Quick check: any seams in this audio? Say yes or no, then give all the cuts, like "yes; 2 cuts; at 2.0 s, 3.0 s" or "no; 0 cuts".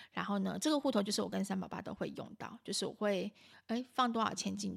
no; 0 cuts